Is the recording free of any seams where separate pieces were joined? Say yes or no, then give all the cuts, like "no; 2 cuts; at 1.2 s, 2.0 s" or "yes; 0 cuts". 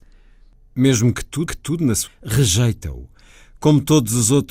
no; 2 cuts; at 1.5 s, 2.1 s